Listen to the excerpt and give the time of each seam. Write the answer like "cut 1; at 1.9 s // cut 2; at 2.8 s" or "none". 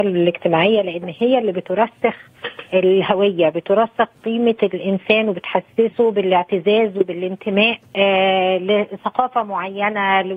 cut 1; at 7.9 s